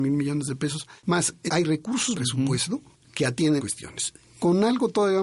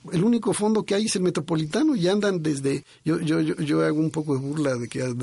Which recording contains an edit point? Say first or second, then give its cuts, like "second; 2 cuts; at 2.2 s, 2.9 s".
first; 3 cuts; at 1.5 s, 2.1 s, 3.6 s